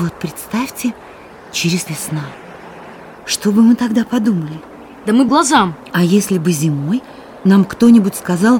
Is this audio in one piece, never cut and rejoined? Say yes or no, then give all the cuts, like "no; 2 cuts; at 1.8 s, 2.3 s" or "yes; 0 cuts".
no; 3 cuts; at 1.9 s, 3.2 s, 5.3 s